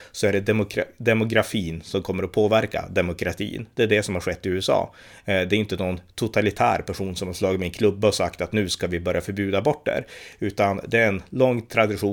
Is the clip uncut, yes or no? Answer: yes